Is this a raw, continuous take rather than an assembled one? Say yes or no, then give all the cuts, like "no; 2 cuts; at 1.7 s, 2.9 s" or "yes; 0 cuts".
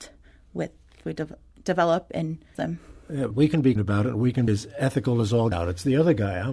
no; 6 cuts; at 1.0 s, 2.5 s, 3.3 s, 3.8 s, 4.5 s, 5.5 s